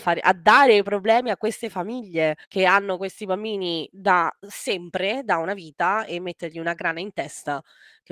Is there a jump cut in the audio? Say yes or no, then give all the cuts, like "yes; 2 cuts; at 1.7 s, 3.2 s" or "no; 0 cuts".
yes; 1 cut; at 2.4 s